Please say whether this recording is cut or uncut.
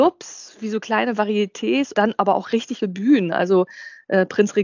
cut